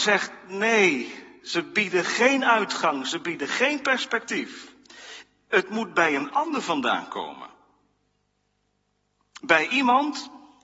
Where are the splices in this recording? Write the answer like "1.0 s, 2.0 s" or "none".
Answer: none